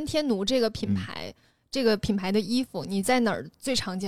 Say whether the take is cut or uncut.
uncut